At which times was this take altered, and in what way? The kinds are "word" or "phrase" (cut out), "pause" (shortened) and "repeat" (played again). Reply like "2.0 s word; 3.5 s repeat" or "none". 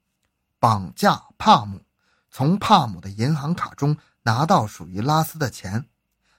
none